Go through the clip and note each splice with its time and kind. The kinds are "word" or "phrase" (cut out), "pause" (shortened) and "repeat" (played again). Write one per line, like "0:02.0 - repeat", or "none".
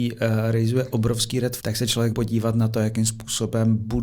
0:01.6 - word
0:02.1 - word